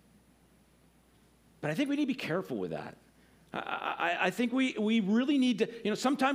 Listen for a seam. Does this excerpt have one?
no; 0 cuts

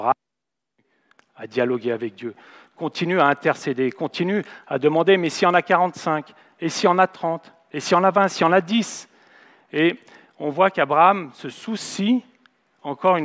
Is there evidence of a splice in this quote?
no; 0 cuts

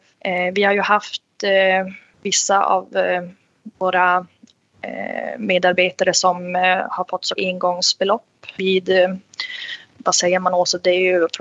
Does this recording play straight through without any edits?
no; 3 cuts; at 3.8 s, 7.4 s, 8.5 s

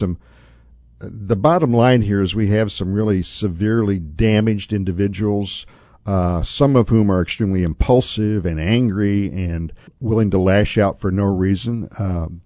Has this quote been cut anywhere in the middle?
yes; 1 cut; at 9.9 s

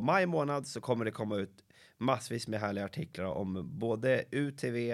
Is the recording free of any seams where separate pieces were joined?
yes; 0 cuts

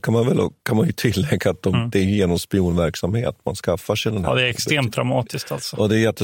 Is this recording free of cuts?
yes; 0 cuts

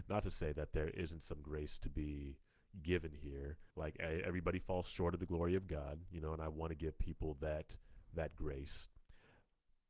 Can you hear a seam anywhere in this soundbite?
yes; 1 cut; at 3.7 s

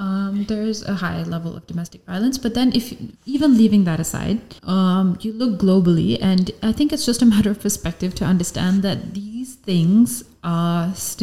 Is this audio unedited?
no; 2 cuts; at 3.2 s, 4.6 s

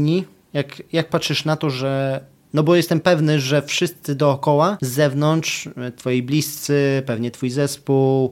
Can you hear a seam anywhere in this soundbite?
no; 0 cuts

